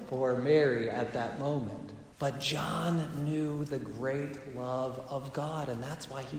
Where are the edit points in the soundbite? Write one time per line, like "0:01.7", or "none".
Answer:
0:02.1